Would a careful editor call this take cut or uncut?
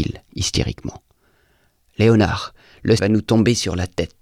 cut